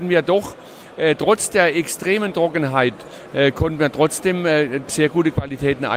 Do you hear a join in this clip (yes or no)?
yes